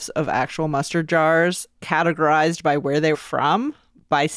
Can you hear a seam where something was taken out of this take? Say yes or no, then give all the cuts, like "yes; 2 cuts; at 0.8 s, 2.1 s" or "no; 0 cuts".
yes; 2 cuts; at 1.7 s, 3.1 s